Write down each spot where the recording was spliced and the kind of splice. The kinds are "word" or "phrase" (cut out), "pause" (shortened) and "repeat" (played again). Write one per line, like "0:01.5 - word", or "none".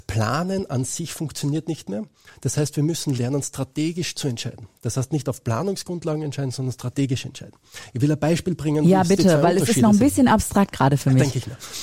none